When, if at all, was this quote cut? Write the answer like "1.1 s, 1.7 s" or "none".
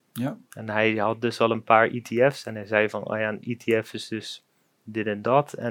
none